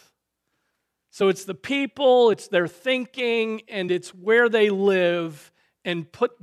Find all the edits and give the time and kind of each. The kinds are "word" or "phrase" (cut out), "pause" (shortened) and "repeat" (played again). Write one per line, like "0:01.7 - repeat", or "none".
none